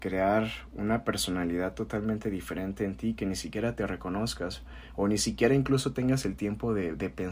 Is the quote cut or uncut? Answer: uncut